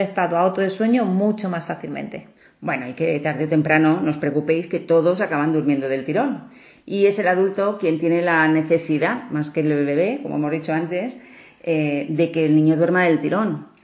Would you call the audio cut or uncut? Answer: uncut